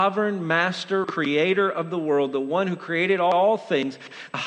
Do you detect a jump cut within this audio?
yes; 1 cut; at 1.0 s

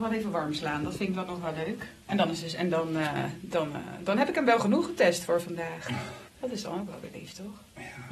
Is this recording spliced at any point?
yes; 1 cut; at 6.3 s

